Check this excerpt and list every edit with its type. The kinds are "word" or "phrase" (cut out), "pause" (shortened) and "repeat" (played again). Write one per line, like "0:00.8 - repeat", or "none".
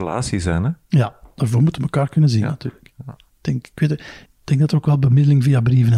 0:03.3 - pause
0:04.2 - pause